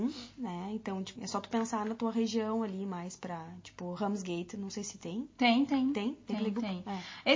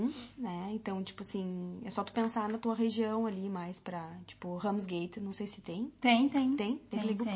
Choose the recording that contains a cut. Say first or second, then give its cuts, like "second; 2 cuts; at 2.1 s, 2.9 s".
first; 1 cut; at 1.2 s